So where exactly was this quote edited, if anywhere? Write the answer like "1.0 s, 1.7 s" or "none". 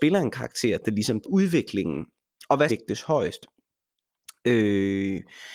1.2 s, 2.7 s